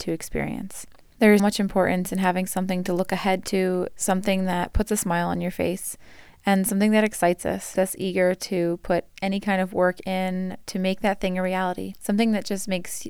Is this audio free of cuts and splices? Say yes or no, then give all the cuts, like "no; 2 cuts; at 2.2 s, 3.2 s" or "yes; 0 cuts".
no; 2 cuts; at 1.4 s, 7.8 s